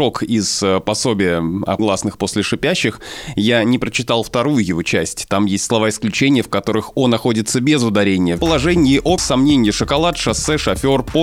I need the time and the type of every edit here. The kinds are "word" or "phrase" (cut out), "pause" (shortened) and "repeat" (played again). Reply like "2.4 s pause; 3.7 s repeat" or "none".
1.8 s word; 8.4 s word; 9.2 s phrase